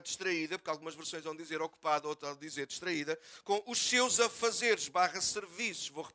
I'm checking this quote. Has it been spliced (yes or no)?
no